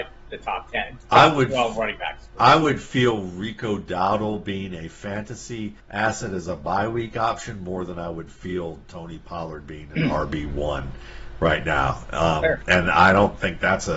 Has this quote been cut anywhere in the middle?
yes; 1 cut; at 5.8 s

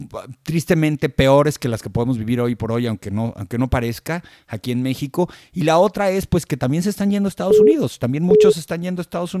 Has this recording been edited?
no; 0 cuts

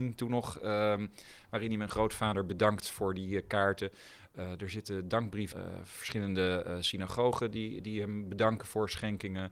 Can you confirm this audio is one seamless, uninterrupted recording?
no; 1 cut; at 5.5 s

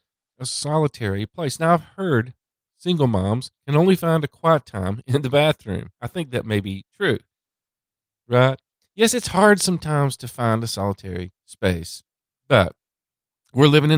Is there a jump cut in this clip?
yes; 3 cuts; at 3.6 s, 5.9 s, 11.4 s

